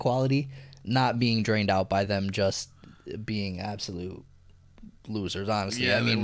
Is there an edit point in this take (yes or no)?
no